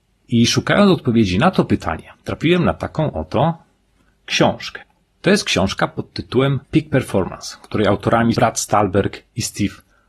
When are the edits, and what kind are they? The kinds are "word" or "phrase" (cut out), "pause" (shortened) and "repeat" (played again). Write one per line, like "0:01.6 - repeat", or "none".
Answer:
0:02.1 - pause
0:06.6 - pause
0:08.3 - word